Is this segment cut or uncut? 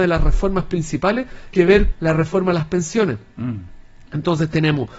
cut